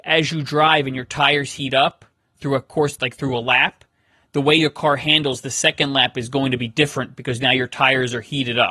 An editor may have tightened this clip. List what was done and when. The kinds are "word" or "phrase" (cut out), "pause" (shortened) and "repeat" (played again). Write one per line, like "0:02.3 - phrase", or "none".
none